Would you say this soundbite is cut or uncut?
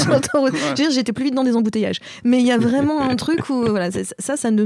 uncut